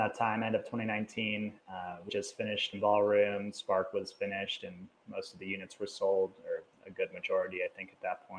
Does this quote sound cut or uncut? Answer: cut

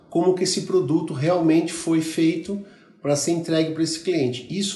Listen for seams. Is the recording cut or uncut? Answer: uncut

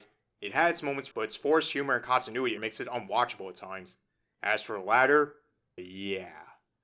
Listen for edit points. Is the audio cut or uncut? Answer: cut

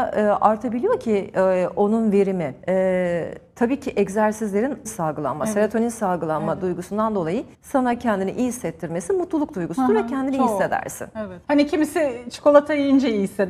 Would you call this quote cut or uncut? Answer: cut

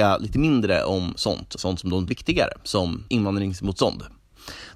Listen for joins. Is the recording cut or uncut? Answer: cut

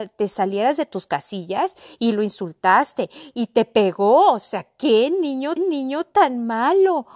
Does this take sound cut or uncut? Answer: cut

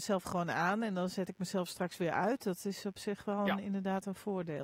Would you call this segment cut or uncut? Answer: uncut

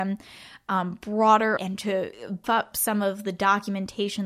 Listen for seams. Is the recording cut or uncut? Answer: cut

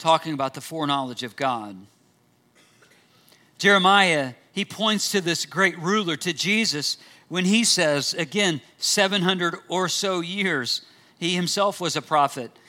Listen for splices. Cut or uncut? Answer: uncut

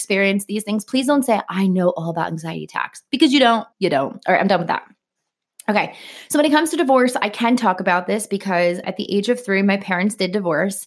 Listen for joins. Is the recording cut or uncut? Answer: cut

